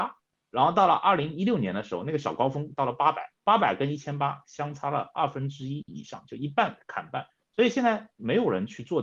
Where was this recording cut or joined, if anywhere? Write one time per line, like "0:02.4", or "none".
0:03.4
0:07.3